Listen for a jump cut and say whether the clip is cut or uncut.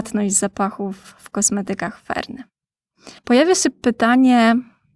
cut